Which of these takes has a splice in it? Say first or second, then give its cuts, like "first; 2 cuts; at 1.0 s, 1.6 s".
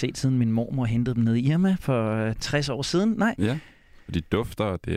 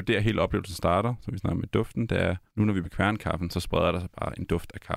second; 2 cuts; at 2.5 s, 2.8 s